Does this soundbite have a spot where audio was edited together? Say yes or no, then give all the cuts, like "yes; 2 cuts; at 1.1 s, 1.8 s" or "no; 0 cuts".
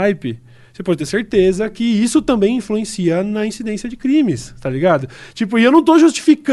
no; 0 cuts